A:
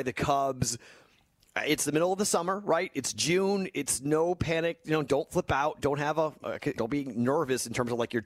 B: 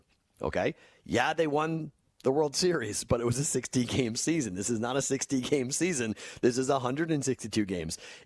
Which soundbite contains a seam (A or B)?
A